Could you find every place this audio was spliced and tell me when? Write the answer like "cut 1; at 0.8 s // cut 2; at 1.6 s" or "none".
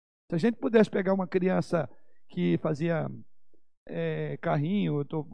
none